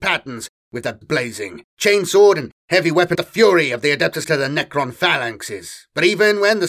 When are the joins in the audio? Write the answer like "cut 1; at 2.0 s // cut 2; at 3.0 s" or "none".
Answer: cut 1; at 1.0 s // cut 2; at 1.7 s // cut 3; at 3.1 s // cut 4; at 4.2 s

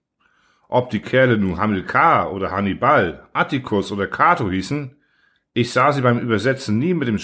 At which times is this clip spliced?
none

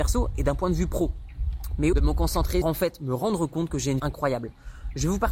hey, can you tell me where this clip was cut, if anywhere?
cut 1; at 1.9 s // cut 2; at 2.6 s // cut 3; at 4.0 s

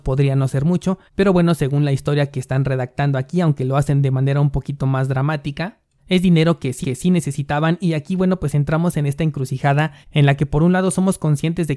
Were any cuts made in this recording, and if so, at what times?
cut 1; at 1.1 s // cut 2; at 6.8 s // cut 3; at 10.0 s

